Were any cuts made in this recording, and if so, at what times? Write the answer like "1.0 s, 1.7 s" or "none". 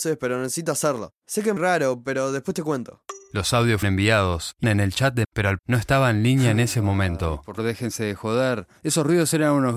1.6 s, 3.8 s, 4.6 s, 5.2 s, 5.6 s, 7.6 s